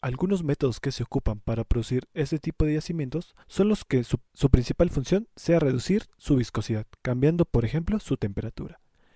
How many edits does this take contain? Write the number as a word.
one